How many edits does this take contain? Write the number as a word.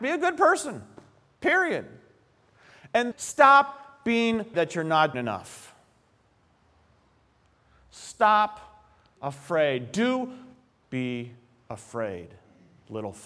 five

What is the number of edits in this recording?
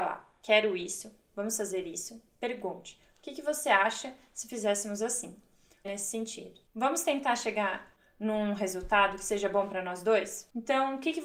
one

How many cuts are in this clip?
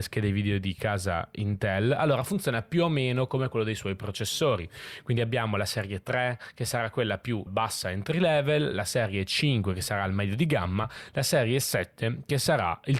one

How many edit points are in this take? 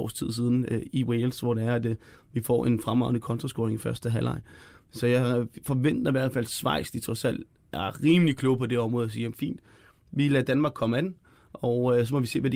zero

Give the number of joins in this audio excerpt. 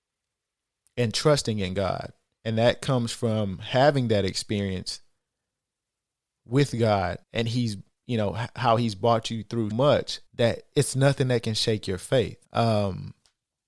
five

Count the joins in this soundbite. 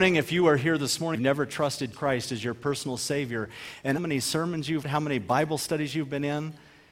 four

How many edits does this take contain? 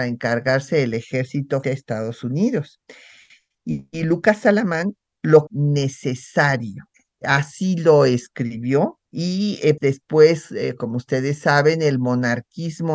five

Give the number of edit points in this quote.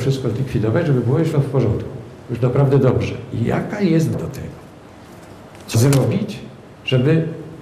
three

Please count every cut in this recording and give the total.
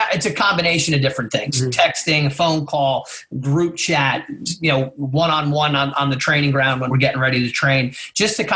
one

